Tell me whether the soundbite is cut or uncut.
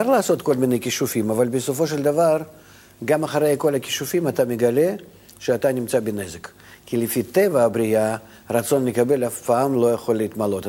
uncut